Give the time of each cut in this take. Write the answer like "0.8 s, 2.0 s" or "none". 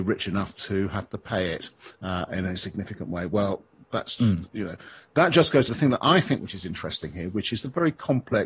5.7 s